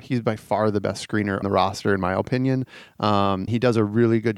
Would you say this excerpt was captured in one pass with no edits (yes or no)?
no